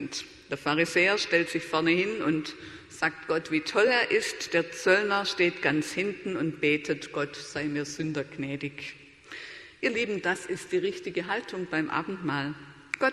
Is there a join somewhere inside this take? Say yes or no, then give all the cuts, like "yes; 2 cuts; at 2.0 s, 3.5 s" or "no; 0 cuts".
no; 0 cuts